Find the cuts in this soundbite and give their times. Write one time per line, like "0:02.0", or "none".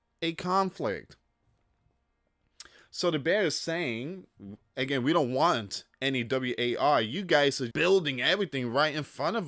0:07.7